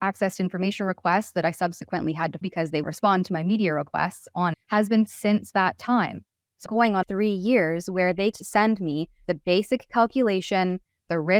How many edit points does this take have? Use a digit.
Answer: 8